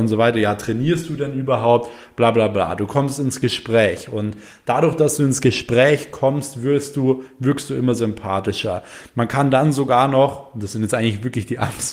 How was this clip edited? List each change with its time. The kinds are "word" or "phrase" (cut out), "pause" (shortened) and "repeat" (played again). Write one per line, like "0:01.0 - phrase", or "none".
none